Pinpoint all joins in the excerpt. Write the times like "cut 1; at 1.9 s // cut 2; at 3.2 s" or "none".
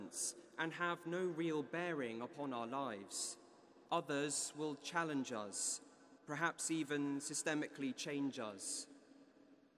cut 1; at 3.9 s // cut 2; at 6.2 s